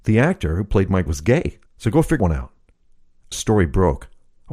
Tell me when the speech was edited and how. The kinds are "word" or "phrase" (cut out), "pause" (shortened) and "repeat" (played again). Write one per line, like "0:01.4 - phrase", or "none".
0:01.1 - word
0:01.7 - pause
0:02.2 - word
0:03.3 - phrase